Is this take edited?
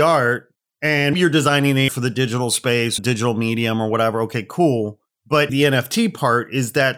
yes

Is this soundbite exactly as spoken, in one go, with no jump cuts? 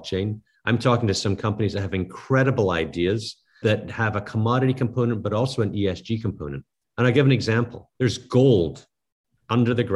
no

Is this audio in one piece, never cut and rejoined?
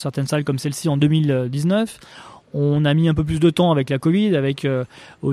yes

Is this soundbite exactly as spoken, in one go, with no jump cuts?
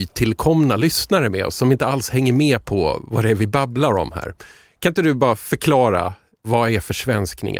yes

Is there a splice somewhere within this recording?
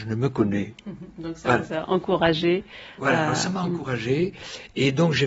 no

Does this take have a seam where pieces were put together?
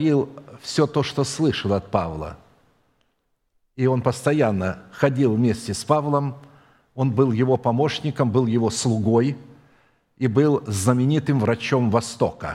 no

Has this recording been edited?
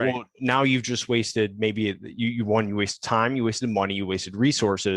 no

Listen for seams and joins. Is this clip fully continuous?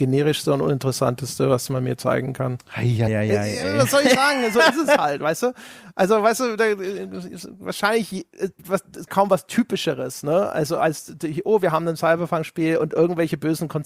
no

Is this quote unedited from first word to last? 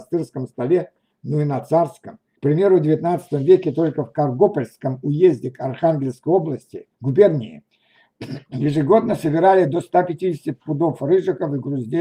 no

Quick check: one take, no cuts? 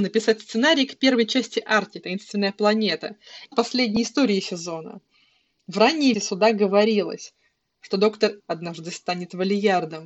no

